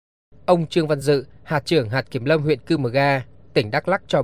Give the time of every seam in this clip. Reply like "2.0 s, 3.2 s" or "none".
none